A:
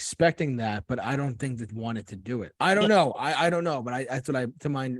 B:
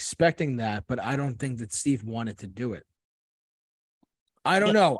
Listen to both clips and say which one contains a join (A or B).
A